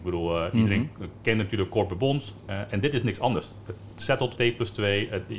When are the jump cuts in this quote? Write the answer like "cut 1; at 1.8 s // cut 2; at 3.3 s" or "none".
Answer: cut 1; at 4.4 s